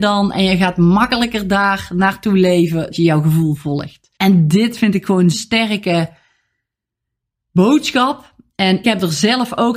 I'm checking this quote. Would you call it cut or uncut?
cut